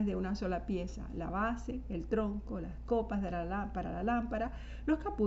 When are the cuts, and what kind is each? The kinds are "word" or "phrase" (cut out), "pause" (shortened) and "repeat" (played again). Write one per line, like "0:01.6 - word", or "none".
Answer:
none

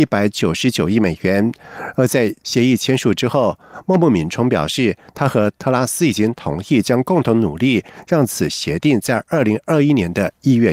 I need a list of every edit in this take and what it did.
0:02.4 - pause

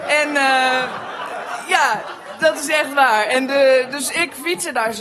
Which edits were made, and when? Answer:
none

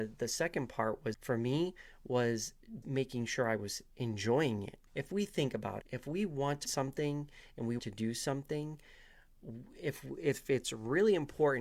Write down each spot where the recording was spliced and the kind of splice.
0:01.1 - word
0:02.8 - word
0:04.9 - word
0:05.8 - word
0:06.6 - word
0:07.8 - word

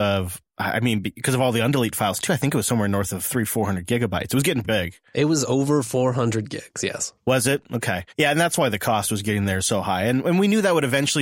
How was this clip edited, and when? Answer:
0:04.6 - word
0:08.1 - pause

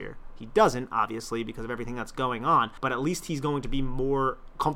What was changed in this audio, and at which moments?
0:02.8 - pause

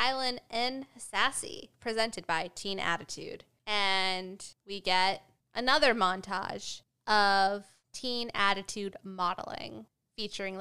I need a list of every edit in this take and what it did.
none

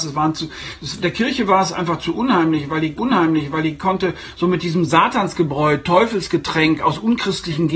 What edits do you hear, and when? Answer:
0:03.0 - repeat

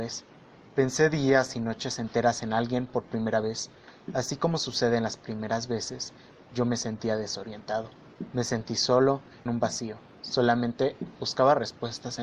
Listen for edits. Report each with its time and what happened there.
0:09.5 - phrase

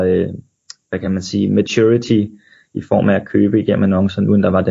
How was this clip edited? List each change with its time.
none

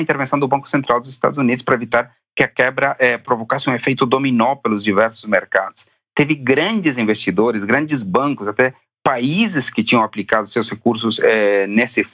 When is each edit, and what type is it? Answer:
none

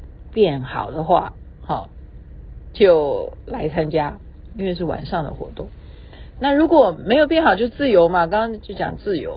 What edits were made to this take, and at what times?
none

